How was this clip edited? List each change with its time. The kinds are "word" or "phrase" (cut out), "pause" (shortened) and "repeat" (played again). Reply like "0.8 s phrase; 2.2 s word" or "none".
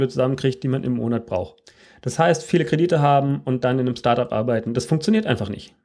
none